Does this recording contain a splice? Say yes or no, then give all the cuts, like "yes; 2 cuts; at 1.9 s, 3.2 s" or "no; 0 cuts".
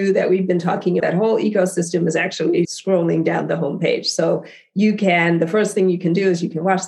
yes; 2 cuts; at 1.0 s, 2.6 s